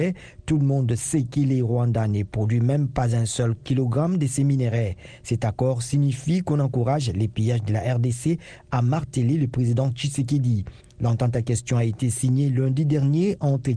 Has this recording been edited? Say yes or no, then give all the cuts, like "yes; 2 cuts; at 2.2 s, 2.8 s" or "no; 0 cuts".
no; 0 cuts